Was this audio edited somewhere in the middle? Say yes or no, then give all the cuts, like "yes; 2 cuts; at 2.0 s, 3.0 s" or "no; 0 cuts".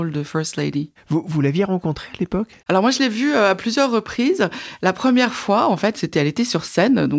yes; 1 cut; at 2.6 s